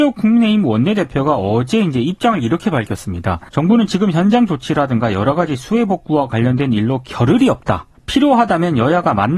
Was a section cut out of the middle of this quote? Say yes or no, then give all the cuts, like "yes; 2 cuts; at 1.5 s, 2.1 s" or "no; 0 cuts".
yes; 2 cuts; at 3.5 s, 8.0 s